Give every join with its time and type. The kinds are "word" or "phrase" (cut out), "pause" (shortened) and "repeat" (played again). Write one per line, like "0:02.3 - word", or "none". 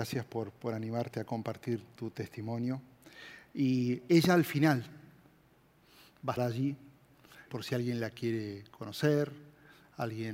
0:06.4 - word
0:07.5 - word